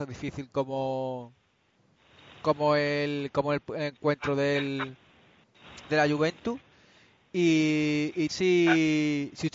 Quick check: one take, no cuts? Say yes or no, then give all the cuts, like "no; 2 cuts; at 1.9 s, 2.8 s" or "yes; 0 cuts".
no; 1 cut; at 8.3 s